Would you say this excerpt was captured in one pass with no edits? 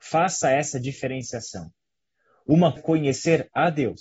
no; 1 cut; at 2.8 s

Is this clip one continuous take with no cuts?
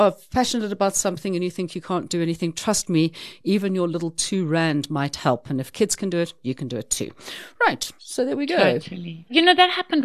yes; 0 cuts

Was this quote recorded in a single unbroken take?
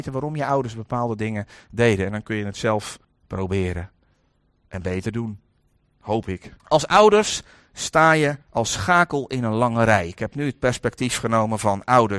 no; 3 cuts; at 3.0 s, 6.6 s, 8.4 s

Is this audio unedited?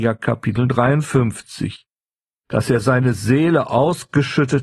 yes; 0 cuts

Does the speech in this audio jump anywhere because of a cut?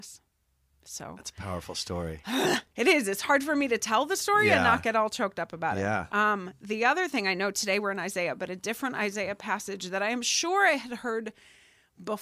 yes; 1 cut; at 2.7 s

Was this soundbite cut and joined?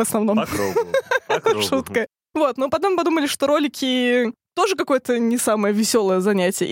no; 0 cuts

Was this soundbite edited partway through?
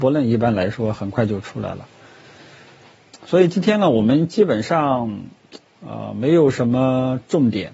no; 0 cuts

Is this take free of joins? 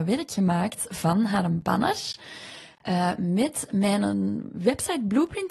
yes; 0 cuts

